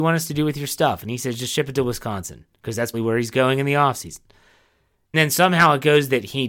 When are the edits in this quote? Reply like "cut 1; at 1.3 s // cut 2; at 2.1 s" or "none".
cut 1; at 2.9 s // cut 2; at 5.1 s